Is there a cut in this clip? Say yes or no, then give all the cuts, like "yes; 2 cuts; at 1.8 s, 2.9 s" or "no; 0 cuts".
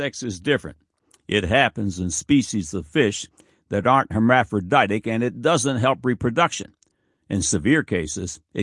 no; 0 cuts